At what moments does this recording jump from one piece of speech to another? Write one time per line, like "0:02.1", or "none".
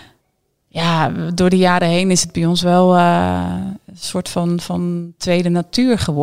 none